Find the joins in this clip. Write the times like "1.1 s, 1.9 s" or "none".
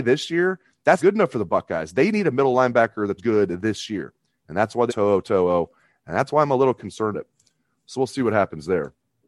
1.0 s, 3.2 s, 4.9 s, 7.1 s